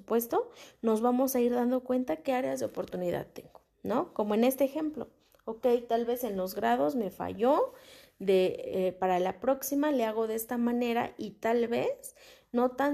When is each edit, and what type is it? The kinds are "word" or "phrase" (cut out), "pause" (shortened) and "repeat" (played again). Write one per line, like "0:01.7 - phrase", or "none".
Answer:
none